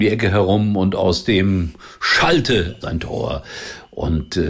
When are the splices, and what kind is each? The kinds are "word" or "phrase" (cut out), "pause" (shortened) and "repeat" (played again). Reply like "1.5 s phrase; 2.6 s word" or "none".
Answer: 2.8 s phrase

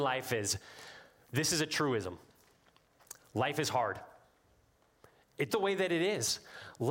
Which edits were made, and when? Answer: 5.5 s phrase

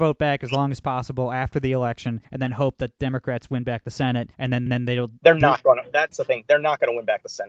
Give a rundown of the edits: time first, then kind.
2.2 s pause; 4.3 s pause; 4.7 s repeat; 6.1 s word

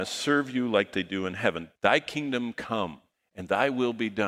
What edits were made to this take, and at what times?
1.8 s pause; 3.1 s pause

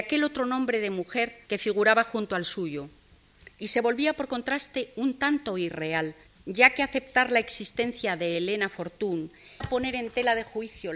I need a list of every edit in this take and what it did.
1.4 s pause; 6.3 s pause; 9.6 s word

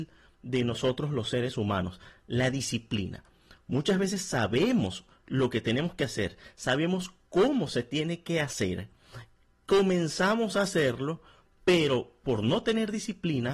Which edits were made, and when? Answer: none

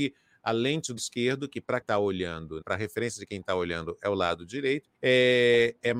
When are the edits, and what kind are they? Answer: 1.0 s word; 1.8 s word; 2.6 s word; 4.9 s pause

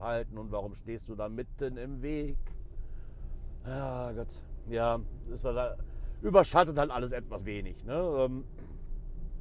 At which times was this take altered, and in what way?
7.4 s word

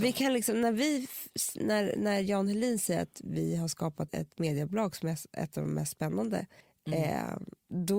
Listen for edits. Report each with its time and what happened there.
4.1 s word; 6.6 s pause

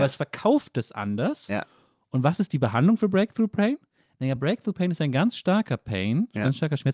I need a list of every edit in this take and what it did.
none

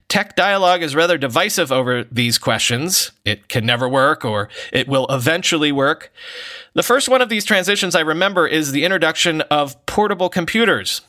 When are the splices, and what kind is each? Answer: 3.2 s pause

